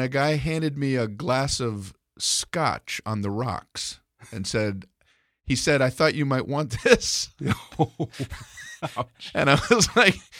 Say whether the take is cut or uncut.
uncut